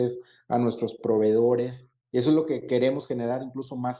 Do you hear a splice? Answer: no; 0 cuts

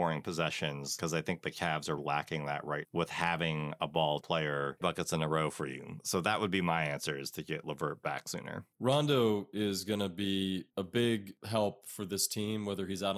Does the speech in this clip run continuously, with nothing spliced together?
no; 5 cuts; at 2.0 s, 2.8 s, 4.2 s, 4.8 s, 8.7 s

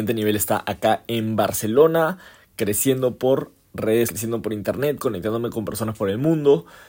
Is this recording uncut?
no; 1 cut; at 4.1 s

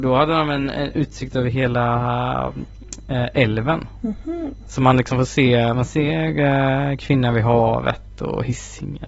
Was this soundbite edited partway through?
no; 0 cuts

